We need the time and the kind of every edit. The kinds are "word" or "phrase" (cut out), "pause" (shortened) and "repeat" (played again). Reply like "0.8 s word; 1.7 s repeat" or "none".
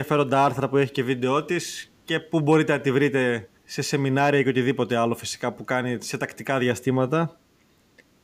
2.0 s pause; 3.6 s pause